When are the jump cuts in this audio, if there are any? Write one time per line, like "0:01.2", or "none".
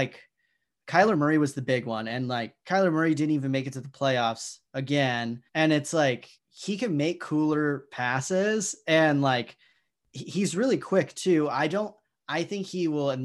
0:05.5
0:06.4